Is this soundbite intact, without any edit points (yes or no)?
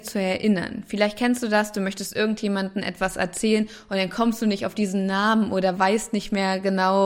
yes